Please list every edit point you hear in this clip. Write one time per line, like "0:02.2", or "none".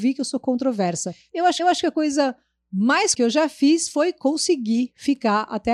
0:01.6
0:03.1